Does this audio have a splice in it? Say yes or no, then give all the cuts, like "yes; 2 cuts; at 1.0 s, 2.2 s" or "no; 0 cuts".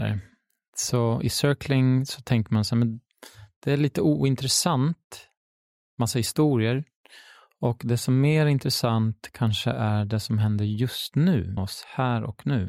yes; 1 cut; at 11.6 s